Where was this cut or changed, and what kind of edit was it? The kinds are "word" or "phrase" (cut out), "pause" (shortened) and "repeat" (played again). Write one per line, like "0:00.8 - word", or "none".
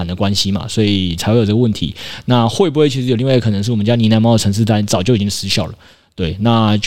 none